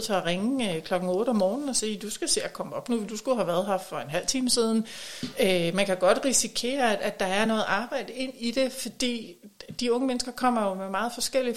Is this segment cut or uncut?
uncut